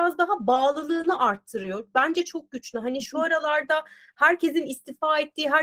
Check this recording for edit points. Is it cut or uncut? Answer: uncut